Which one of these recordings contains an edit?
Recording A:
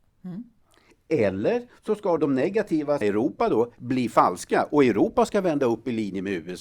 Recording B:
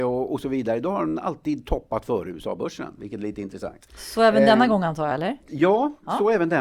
A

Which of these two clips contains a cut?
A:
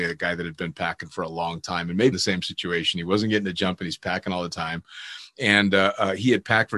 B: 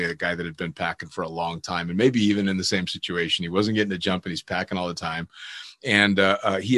A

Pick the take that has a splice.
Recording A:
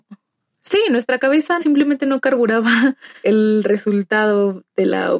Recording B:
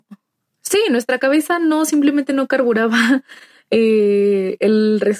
A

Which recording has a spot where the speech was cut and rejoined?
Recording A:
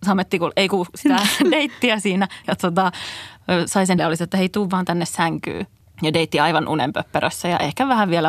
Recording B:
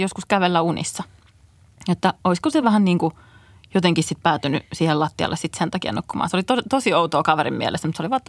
A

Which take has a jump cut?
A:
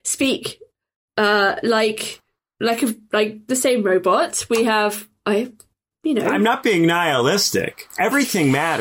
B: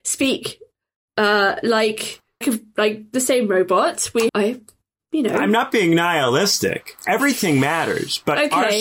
B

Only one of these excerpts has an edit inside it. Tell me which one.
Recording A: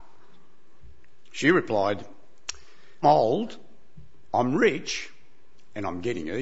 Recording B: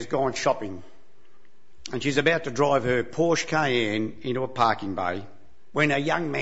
A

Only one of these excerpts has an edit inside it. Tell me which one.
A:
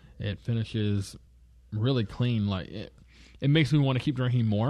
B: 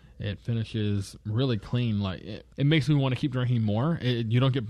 B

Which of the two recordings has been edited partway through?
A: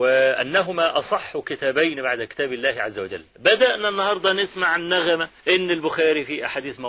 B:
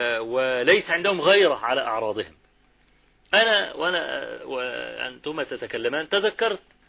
A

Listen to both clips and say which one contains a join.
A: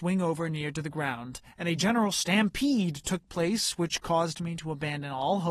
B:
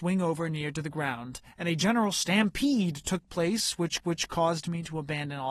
B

